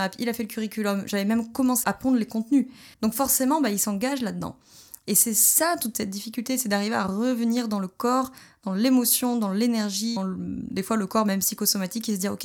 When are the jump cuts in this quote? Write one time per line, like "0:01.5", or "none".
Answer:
0:01.8
0:02.9
0:10.2